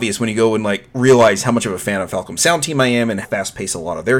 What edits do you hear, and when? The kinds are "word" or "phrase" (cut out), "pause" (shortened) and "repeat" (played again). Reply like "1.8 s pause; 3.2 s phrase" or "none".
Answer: 3.2 s word

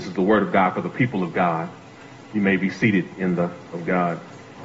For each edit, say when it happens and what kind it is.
2.2 s pause; 3.7 s word

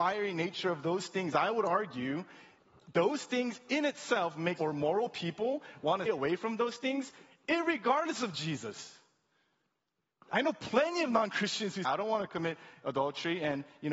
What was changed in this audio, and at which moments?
4.6 s word; 6.1 s word; 11.8 s phrase

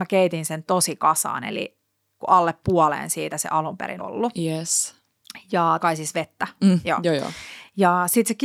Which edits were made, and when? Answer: 2.2 s word; 3.3 s word; 4.0 s word; 5.8 s word

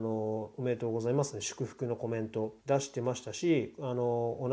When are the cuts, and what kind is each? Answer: 2.6 s pause

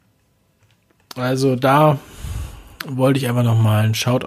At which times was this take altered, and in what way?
none

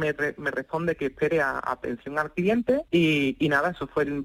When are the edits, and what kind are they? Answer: 2.9 s pause

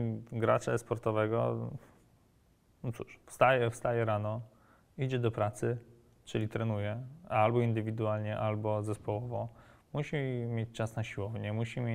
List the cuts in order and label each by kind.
none

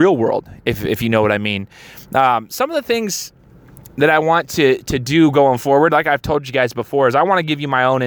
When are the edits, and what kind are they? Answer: none

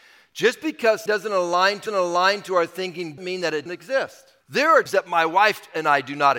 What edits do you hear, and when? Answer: 1.1 s word; 1.9 s repeat; 3.2 s word; 3.7 s word; 4.4 s pause; 4.9 s word

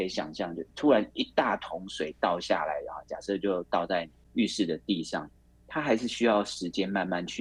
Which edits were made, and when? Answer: none

